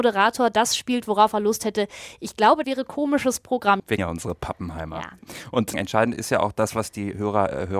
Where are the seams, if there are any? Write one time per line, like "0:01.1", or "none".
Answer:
0:02.6
0:04.0